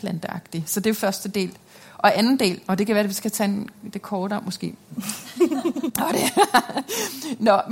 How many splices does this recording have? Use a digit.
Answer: 0